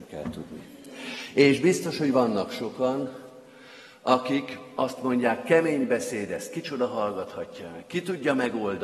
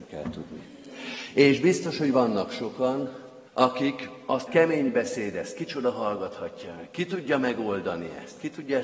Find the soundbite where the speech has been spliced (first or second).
second